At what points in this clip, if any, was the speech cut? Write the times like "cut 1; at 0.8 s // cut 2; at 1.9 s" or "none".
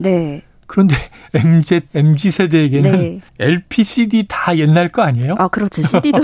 cut 1; at 1.9 s // cut 2; at 3.3 s